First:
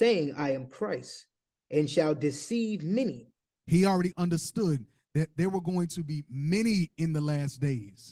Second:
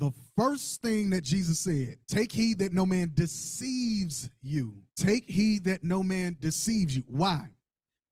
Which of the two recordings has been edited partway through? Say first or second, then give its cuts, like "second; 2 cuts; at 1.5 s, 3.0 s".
second; 2 cuts; at 2.0 s, 4.9 s